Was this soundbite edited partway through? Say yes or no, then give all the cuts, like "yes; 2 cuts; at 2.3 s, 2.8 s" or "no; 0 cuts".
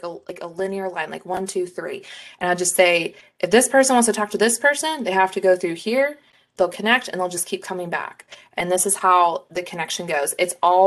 no; 0 cuts